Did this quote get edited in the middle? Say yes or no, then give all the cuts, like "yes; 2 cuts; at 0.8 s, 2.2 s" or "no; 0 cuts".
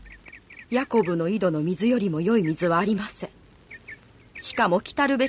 no; 0 cuts